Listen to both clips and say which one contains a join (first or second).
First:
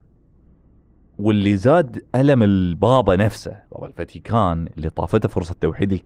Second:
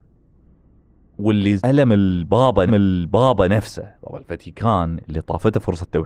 second